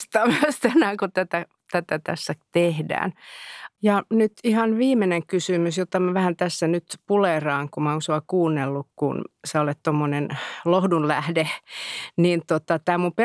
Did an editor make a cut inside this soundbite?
yes; 1 cut; at 9.4 s

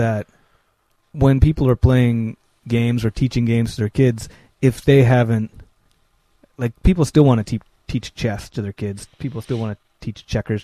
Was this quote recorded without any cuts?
yes; 0 cuts

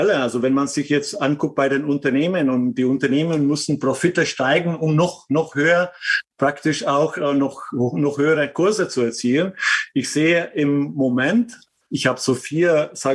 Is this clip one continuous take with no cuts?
yes; 0 cuts

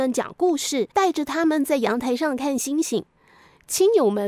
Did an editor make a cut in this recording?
yes; 2 cuts; at 0.9 s, 3.2 s

